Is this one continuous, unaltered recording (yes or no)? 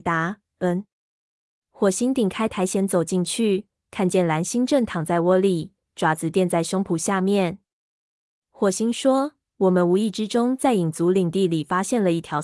yes